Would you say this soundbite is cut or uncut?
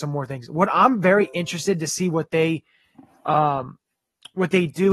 uncut